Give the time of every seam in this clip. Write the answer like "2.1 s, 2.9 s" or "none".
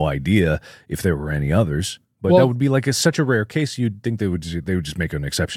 none